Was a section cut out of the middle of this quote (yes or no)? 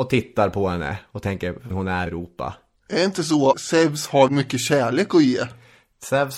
yes